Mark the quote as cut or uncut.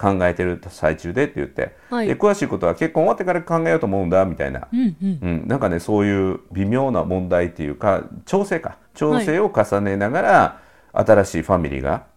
cut